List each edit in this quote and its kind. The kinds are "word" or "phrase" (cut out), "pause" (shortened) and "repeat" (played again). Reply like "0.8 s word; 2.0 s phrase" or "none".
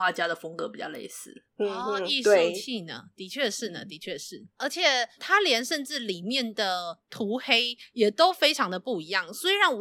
1.5 s pause; 4.5 s pause; 5.2 s word